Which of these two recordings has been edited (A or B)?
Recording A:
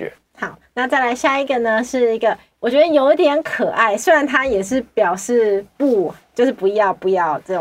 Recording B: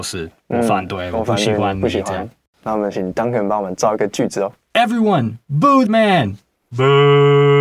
B